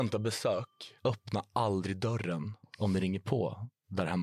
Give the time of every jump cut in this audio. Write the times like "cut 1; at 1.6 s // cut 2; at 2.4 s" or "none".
cut 1; at 1.0 s